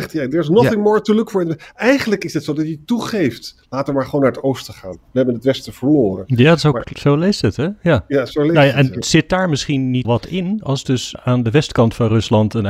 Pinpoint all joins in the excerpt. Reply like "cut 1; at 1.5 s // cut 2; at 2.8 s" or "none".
cut 1; at 6.8 s // cut 2; at 10.0 s // cut 3; at 11.1 s